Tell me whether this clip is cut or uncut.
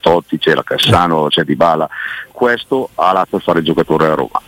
cut